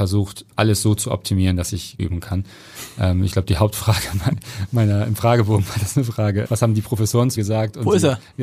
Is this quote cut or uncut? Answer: cut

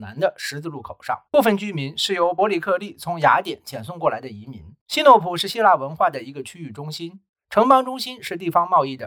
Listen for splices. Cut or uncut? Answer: cut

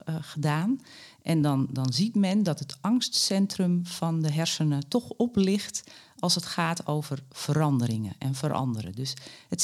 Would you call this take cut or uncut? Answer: uncut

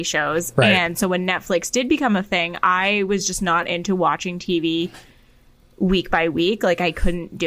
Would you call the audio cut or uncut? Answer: uncut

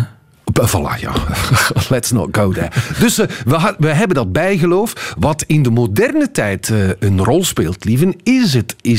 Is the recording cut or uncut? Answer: uncut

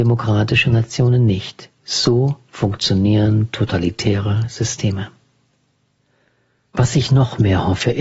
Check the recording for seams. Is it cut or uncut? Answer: uncut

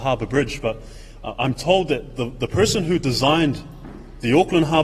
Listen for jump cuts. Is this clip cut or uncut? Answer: uncut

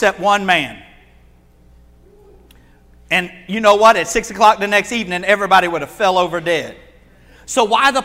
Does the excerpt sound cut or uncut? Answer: uncut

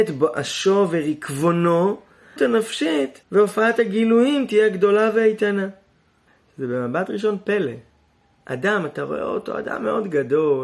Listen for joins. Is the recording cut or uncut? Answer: cut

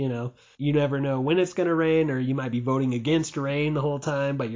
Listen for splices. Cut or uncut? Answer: uncut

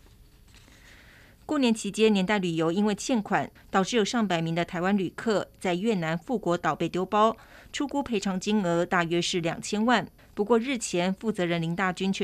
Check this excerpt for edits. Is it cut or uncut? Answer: uncut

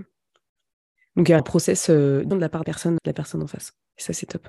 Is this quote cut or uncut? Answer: cut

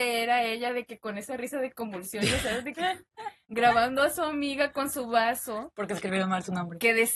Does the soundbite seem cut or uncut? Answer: uncut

